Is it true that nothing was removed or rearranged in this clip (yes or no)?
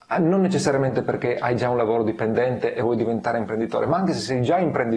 yes